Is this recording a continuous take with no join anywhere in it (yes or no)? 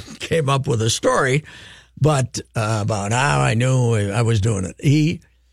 yes